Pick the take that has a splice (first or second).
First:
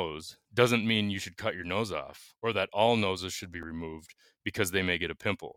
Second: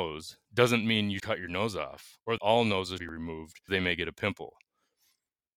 second